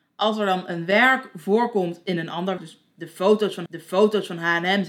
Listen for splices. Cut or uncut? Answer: cut